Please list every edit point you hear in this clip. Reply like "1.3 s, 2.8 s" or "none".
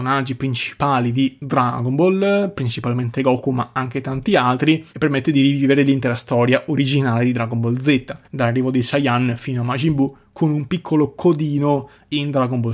4.9 s, 8.2 s